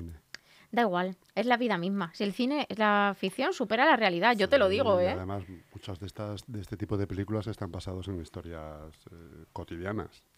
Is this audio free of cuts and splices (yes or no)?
no